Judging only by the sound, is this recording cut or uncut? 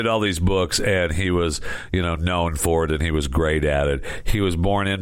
uncut